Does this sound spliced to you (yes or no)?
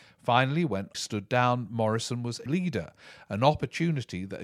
yes